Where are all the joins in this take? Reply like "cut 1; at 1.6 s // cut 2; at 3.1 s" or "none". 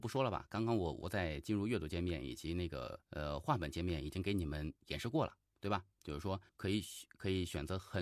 cut 1; at 3.0 s // cut 2; at 4.8 s // cut 3; at 6.5 s